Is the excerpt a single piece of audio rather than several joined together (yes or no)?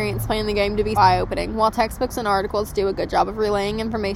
no